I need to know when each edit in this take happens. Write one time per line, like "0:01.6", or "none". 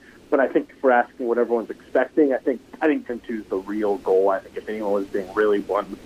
0:03.1